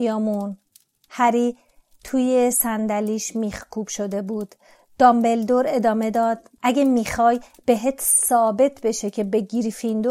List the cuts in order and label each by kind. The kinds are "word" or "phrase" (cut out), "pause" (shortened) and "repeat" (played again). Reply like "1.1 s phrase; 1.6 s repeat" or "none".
6.6 s pause